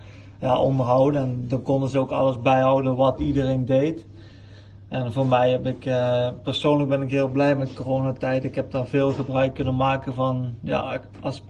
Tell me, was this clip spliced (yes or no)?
no